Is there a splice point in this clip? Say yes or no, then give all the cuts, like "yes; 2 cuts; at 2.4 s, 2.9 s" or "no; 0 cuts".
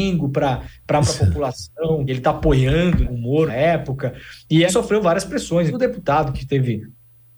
yes; 6 cuts; at 1.0 s, 2.1 s, 3.0 s, 3.5 s, 4.7 s, 5.7 s